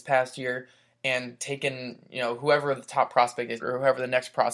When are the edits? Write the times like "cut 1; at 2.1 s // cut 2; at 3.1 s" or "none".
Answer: cut 1; at 3.6 s